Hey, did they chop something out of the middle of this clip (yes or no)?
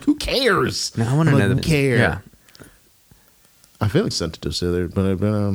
yes